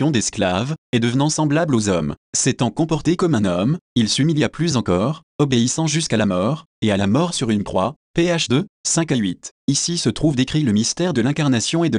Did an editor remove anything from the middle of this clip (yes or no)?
no